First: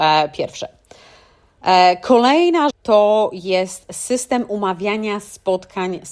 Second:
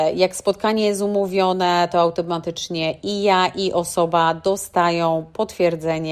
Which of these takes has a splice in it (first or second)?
first